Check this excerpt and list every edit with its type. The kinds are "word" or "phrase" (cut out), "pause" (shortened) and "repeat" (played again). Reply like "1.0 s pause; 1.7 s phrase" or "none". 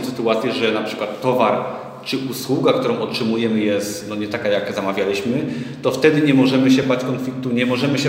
none